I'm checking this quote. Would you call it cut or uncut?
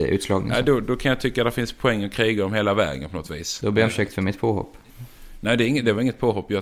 cut